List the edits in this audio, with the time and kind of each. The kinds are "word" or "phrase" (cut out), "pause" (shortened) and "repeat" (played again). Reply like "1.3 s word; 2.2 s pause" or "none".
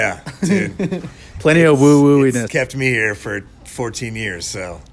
2.5 s word